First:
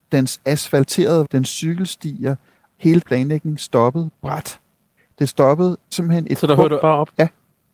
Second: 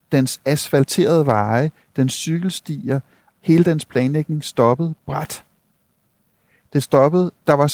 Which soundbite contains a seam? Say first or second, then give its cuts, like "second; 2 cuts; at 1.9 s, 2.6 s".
first; 5 cuts; at 1.2 s, 3.0 s, 5.0 s, 5.9 s, 6.8 s